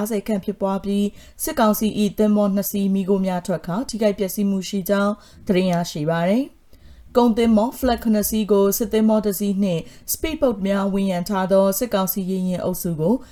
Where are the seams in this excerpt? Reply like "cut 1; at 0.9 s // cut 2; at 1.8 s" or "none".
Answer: none